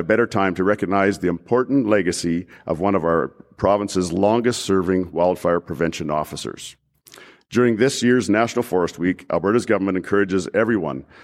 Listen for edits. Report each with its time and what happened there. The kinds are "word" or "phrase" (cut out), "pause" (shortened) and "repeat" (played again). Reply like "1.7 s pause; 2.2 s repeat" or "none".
none